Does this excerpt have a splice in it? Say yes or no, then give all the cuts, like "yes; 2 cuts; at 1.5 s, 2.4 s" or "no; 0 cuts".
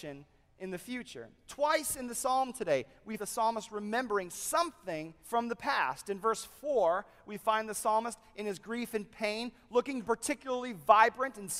yes; 3 cuts; at 3.2 s, 5.2 s, 10.0 s